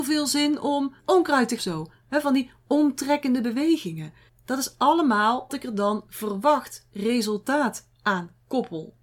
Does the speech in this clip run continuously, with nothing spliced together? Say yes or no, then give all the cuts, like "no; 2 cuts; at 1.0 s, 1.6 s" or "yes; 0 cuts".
no; 5 cuts; at 1.0 s, 1.6 s, 4.3 s, 5.5 s, 6.1 s